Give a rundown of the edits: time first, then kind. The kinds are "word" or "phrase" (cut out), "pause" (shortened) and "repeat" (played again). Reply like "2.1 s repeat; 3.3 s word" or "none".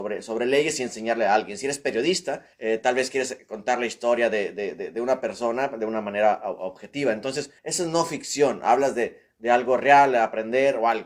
2.5 s pause; 7.6 s pause